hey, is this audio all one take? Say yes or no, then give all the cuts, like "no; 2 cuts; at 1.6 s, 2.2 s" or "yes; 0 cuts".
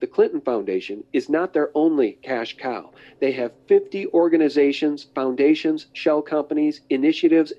yes; 0 cuts